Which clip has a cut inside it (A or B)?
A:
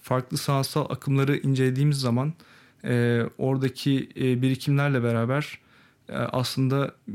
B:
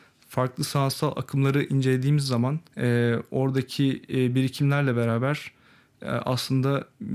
B